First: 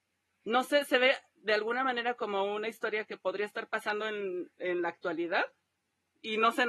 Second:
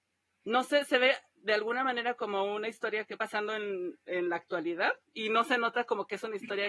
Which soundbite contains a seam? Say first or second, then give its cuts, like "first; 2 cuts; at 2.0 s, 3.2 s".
second; 2 cuts; at 3.2 s, 5.0 s